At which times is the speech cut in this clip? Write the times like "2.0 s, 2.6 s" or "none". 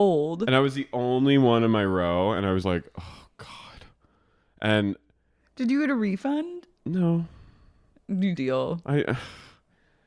2.6 s, 8.4 s